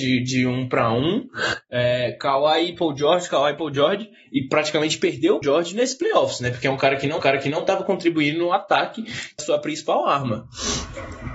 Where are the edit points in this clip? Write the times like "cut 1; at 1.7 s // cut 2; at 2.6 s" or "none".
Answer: cut 1; at 5.4 s // cut 2; at 7.2 s // cut 3; at 9.4 s

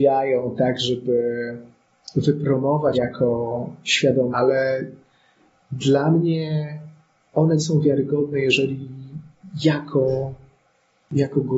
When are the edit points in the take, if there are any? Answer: cut 1; at 2.9 s // cut 2; at 4.3 s // cut 3; at 7.6 s

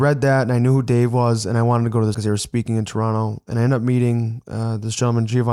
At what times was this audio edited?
cut 1; at 2.1 s

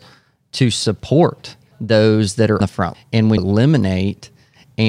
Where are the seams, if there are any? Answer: cut 1; at 1.7 s // cut 2; at 2.6 s // cut 3; at 2.9 s // cut 4; at 3.4 s

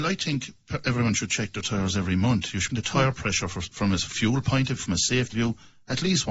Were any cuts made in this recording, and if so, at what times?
cut 1; at 2.7 s // cut 2; at 4.8 s // cut 3; at 5.3 s

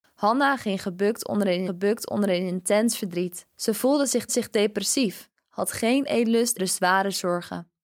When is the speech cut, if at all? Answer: cut 1; at 1.7 s // cut 2; at 3.5 s // cut 3; at 4.3 s // cut 4; at 6.6 s

